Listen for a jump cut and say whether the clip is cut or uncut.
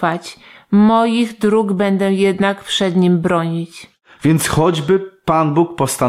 uncut